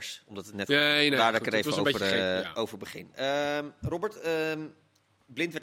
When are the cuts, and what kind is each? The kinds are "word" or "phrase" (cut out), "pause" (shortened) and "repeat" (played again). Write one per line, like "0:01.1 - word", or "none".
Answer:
none